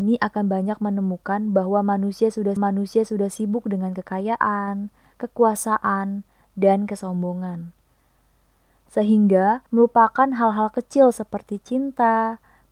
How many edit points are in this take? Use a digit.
2